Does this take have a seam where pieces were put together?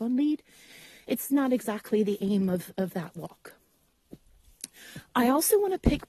no; 0 cuts

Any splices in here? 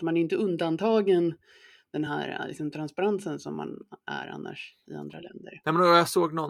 no; 0 cuts

